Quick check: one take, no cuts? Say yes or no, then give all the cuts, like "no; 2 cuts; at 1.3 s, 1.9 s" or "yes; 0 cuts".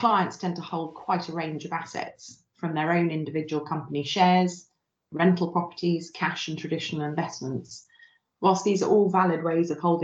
yes; 0 cuts